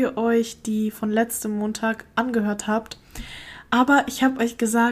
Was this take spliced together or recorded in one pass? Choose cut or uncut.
cut